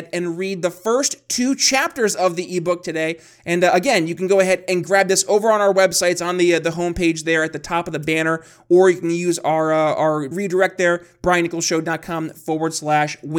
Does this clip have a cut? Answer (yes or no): yes